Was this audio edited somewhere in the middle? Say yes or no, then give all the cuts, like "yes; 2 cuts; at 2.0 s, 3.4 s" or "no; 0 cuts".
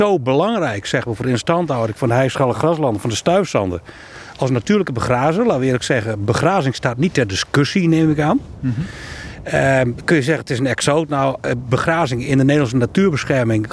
no; 0 cuts